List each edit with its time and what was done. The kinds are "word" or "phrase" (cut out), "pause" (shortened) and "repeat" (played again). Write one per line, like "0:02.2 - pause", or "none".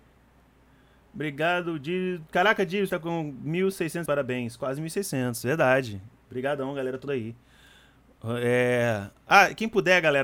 0:02.9 - word
0:04.1 - word
0:07.1 - word